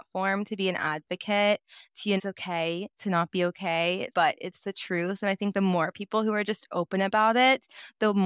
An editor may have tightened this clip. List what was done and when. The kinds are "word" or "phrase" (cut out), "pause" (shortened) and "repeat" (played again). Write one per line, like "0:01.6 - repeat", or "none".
0:02.2 - phrase
0:04.1 - phrase